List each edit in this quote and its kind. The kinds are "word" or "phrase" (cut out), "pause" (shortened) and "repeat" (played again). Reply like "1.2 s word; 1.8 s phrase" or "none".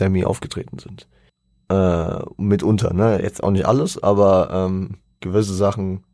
1.3 s pause